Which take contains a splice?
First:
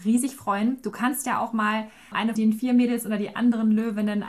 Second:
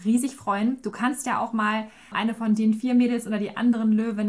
first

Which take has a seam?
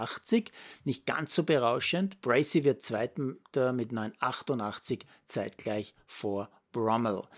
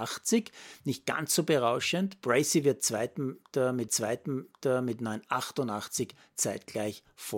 second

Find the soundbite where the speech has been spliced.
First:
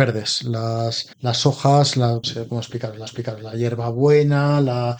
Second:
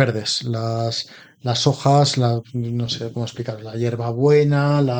first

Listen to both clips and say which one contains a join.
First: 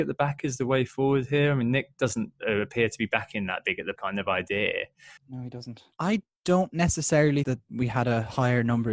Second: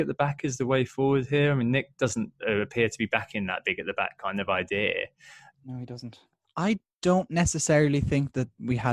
first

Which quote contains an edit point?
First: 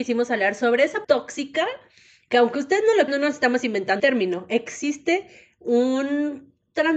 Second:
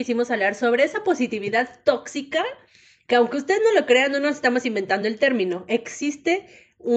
first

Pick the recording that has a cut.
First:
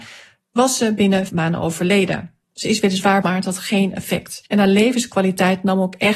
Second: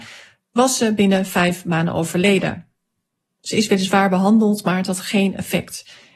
first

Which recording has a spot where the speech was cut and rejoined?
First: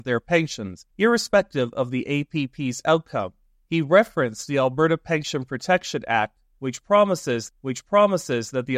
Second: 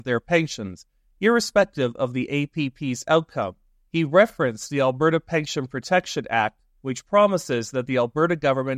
first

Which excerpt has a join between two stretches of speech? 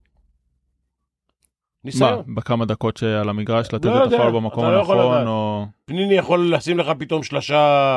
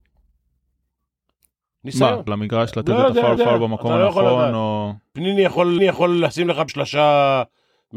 second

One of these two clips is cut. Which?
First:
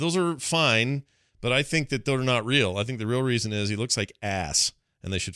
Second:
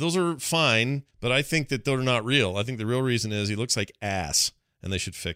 second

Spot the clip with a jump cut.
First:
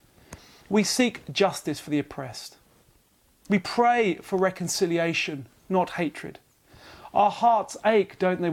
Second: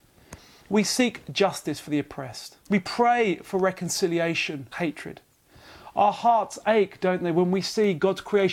second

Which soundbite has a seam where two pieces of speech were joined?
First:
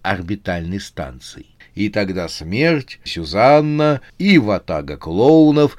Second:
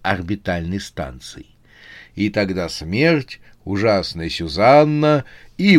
first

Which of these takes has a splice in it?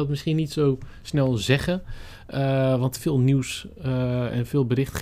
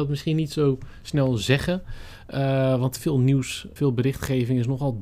second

